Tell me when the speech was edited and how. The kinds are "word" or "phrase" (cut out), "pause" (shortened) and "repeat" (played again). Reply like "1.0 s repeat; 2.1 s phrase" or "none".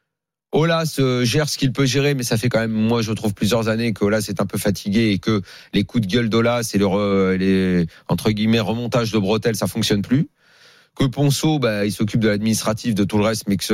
none